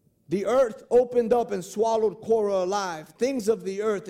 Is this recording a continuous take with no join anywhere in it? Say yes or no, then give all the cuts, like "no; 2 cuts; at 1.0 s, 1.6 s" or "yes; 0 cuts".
yes; 0 cuts